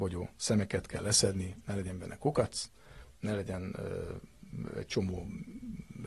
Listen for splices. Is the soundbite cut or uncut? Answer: uncut